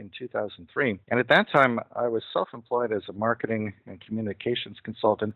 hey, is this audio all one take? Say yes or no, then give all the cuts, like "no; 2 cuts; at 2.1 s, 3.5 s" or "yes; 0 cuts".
no; 1 cut; at 1.0 s